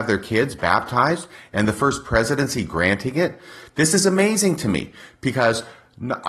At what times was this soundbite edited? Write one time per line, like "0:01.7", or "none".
none